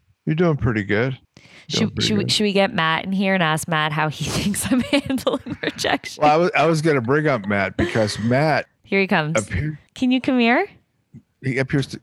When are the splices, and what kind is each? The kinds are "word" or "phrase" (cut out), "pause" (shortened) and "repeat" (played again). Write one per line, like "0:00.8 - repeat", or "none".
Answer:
0:01.2 - pause
0:09.9 - pause